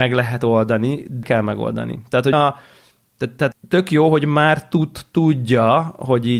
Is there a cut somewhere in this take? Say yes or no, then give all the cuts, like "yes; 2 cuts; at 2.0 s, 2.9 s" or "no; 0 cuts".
yes; 3 cuts; at 1.2 s, 2.3 s, 3.5 s